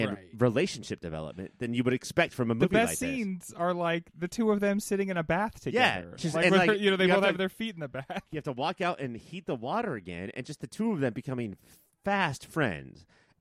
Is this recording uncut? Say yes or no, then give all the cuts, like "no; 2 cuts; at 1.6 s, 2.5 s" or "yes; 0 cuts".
yes; 0 cuts